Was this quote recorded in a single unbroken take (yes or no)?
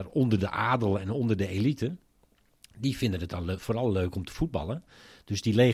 yes